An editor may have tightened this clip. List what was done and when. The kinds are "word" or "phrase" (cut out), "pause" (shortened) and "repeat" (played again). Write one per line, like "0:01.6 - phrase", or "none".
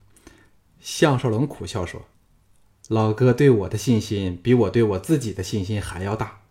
0:02.1 - pause